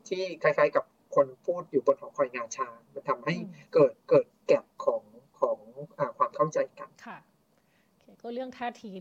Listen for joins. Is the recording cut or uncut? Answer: cut